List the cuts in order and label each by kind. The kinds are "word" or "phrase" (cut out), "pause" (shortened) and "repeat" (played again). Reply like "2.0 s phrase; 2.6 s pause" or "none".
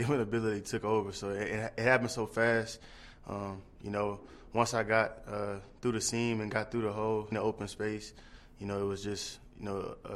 7.3 s word